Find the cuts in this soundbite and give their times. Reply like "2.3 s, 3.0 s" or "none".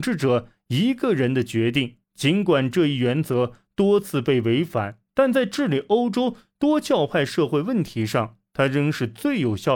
2.0 s, 5.1 s

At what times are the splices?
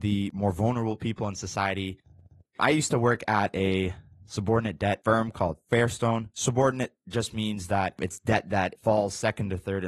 none

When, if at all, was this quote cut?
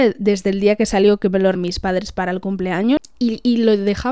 1.6 s

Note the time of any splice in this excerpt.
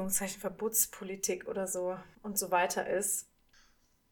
2.1 s

